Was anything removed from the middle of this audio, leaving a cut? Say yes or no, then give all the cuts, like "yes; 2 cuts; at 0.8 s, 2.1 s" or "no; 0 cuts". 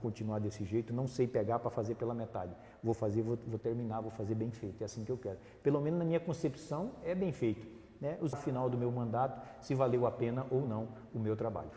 yes; 1 cut; at 8.3 s